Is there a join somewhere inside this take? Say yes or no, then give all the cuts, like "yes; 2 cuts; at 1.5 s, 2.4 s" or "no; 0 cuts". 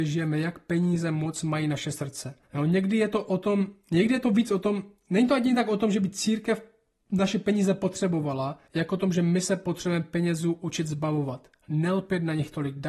yes; 2 cuts; at 2.4 s, 8.7 s